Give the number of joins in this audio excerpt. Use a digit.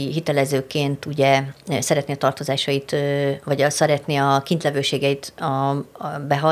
0